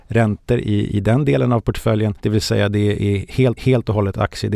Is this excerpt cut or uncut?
cut